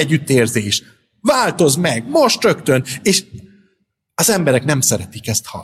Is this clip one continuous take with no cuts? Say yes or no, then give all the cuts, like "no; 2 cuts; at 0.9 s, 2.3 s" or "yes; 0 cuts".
yes; 0 cuts